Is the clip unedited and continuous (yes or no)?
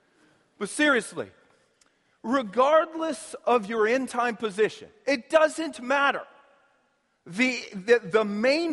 yes